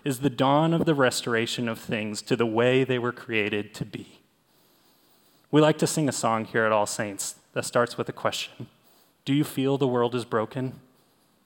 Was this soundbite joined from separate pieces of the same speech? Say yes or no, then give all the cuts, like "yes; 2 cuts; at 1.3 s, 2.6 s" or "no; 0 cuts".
no; 0 cuts